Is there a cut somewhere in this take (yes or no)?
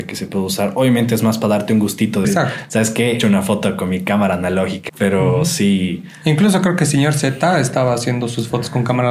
yes